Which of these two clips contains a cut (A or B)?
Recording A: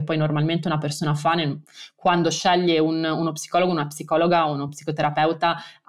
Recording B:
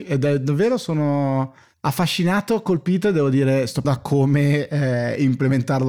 B